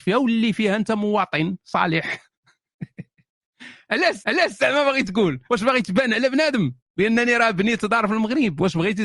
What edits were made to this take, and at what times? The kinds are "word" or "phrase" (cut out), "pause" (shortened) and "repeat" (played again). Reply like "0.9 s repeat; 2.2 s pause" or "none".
4.2 s repeat; 5.5 s pause